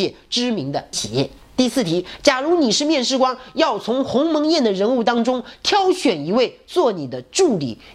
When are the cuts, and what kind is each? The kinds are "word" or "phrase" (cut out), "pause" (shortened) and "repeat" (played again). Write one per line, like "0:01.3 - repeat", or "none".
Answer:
0:00.9 - word